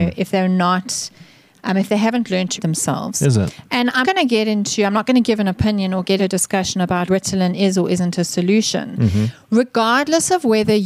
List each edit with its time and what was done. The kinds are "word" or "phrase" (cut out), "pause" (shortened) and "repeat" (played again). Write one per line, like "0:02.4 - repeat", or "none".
0:02.6 - word
0:04.0 - word
0:06.2 - word
0:07.1 - word